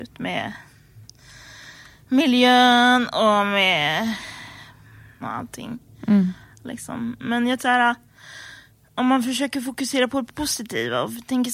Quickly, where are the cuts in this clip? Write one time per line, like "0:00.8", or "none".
0:05.2
0:07.6